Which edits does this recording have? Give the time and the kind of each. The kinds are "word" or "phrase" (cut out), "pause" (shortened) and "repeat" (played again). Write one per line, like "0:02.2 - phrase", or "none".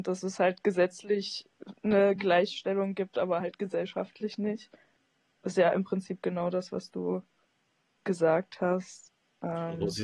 none